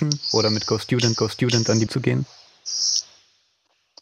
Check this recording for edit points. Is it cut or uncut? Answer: cut